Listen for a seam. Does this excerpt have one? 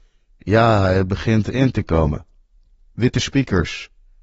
no; 0 cuts

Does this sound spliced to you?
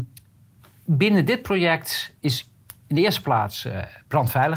yes; 1 cut; at 2.2 s

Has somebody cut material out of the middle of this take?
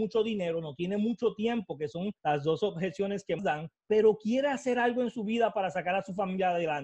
yes; 3 cuts; at 2.2 s, 3.4 s, 3.8 s

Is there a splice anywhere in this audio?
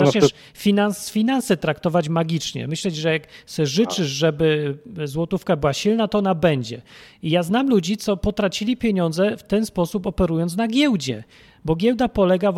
no; 0 cuts

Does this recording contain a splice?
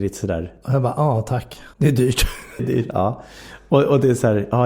yes; 2 cuts; at 1.7 s, 2.6 s

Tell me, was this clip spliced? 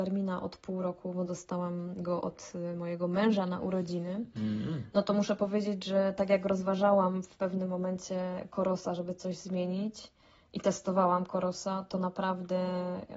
no; 0 cuts

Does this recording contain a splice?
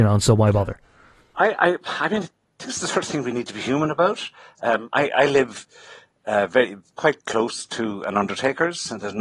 no; 0 cuts

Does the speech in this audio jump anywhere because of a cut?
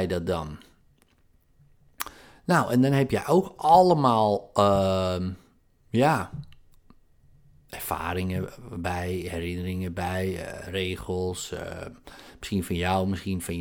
no; 0 cuts

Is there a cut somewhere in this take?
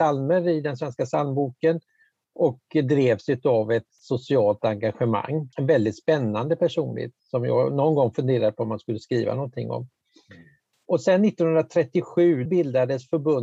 yes; 3 cuts; at 5.5 s, 7.2 s, 12.5 s

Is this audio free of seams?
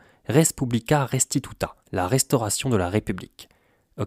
no; 1 cut; at 1.8 s

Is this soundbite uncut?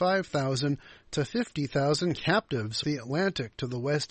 no; 1 cut; at 2.8 s

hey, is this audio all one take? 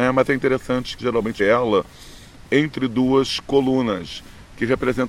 no; 2 cuts; at 1.0 s, 1.4 s

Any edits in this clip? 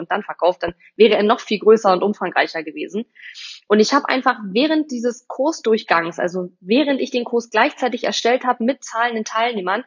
no; 0 cuts

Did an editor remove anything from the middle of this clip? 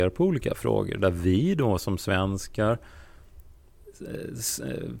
no; 0 cuts

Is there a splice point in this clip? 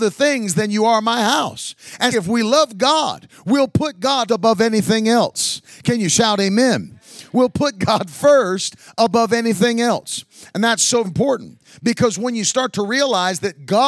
yes; 3 cuts; at 2.1 s, 4.3 s, 11.0 s

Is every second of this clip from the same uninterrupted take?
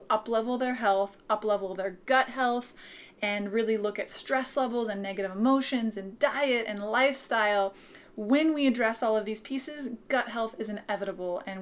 yes; 0 cuts

